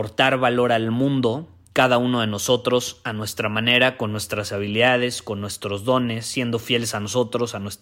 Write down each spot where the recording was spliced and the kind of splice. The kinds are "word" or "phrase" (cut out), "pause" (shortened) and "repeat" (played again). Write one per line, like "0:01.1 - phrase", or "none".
none